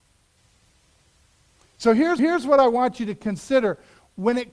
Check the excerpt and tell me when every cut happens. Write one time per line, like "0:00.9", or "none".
0:02.2